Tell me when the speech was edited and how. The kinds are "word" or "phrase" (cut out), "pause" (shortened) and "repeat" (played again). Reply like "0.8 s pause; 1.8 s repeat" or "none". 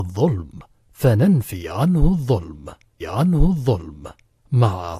3.0 s repeat